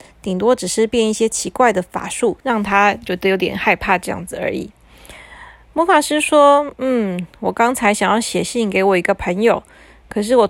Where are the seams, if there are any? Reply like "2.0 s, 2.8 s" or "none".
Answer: 2.4 s